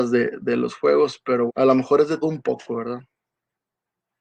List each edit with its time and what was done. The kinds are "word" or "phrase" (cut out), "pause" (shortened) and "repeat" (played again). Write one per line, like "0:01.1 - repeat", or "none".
0:01.5 - word
0:02.2 - word

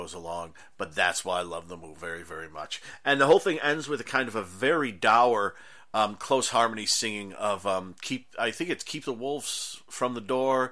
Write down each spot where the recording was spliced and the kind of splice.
0:02.0 - word

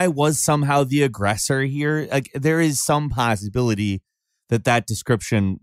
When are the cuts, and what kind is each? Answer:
none

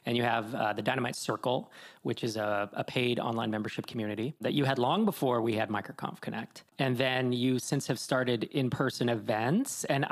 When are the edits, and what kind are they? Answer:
0:06.7 - pause

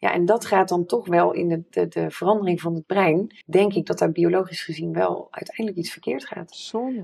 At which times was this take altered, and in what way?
0:03.4 - pause

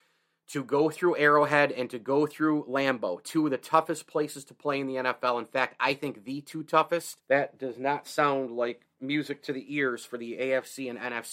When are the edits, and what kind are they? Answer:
0:07.2 - pause

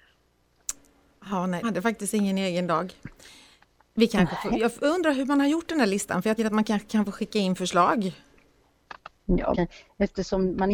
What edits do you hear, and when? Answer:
0:01.6 - word
0:06.4 - word
0:09.5 - word

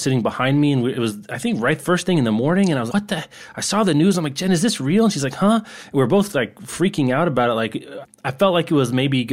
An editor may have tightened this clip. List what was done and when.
0:02.9 - word
0:08.0 - word

